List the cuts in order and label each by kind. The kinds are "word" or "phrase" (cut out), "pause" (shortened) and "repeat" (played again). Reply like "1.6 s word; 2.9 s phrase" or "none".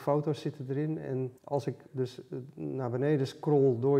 1.4 s pause; 1.9 s word